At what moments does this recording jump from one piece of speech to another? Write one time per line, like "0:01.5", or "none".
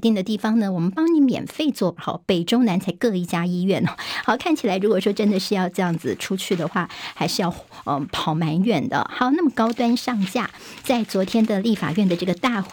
0:02.0